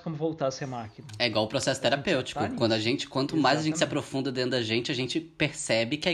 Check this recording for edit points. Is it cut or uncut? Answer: uncut